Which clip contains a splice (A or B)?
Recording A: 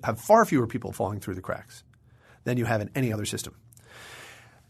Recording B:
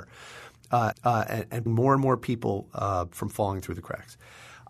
B